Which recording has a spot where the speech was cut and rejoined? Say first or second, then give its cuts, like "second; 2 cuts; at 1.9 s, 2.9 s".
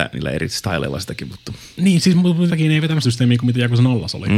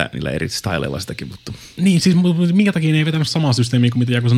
first; 2 cuts; at 2.5 s, 3.0 s